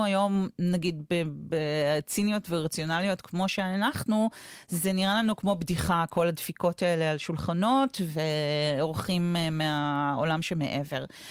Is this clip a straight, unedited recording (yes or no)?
yes